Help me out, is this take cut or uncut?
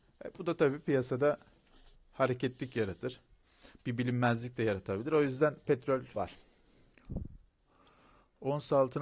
cut